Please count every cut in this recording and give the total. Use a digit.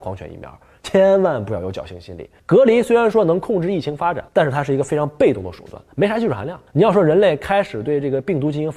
4